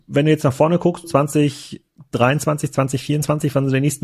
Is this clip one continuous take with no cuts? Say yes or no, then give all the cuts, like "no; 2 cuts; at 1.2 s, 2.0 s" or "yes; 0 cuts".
no; 1 cut; at 1.0 s